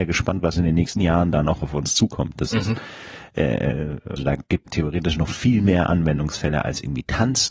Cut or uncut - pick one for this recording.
cut